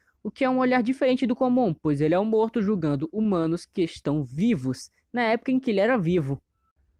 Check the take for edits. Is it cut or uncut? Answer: uncut